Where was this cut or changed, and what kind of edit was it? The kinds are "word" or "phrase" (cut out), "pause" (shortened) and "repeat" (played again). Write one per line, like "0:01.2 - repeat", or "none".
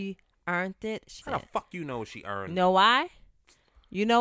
0:01.2 - word